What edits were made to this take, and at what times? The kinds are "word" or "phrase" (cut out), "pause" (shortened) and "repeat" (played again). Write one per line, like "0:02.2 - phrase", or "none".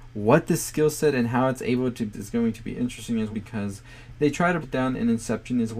0:02.1 - word
0:03.3 - word
0:04.6 - word